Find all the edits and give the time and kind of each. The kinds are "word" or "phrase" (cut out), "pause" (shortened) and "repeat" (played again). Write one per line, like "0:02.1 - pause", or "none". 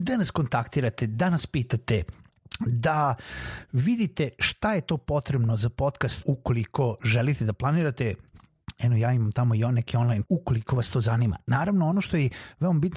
0:06.2 - word
0:10.3 - word